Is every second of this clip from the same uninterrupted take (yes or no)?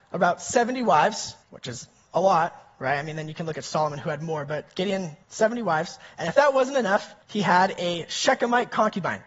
no